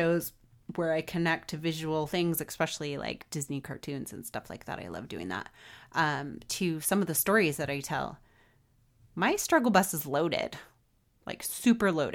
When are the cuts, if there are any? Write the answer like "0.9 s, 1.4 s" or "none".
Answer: none